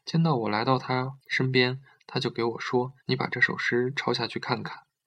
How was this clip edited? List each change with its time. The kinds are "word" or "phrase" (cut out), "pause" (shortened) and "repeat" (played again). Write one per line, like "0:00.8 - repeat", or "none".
0:01.2 - pause
0:03.0 - pause